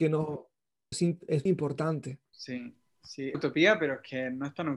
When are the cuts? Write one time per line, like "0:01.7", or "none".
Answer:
0:00.9
0:01.5
0:02.3
0:03.3